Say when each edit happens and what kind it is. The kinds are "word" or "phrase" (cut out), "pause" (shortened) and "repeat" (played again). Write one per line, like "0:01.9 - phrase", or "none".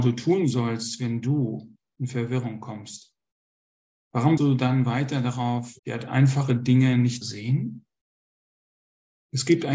0:04.4 - word
0:05.8 - pause
0:07.2 - word